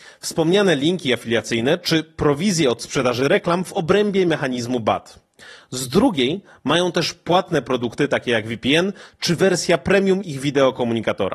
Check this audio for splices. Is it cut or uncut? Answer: uncut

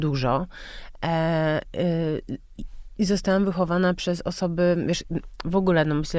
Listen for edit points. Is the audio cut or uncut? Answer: uncut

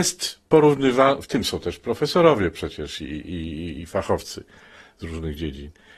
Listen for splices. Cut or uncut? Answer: uncut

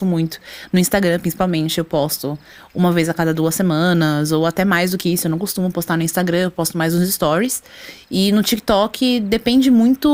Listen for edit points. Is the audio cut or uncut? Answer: uncut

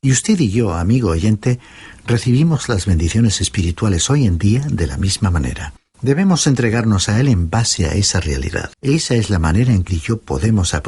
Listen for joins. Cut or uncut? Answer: cut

